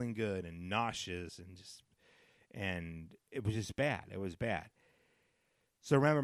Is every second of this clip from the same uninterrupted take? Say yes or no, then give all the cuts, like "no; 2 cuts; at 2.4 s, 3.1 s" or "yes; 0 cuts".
yes; 0 cuts